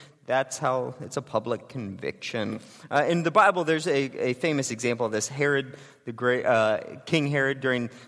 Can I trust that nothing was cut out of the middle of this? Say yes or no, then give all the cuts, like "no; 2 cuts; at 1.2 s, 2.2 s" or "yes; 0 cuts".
yes; 0 cuts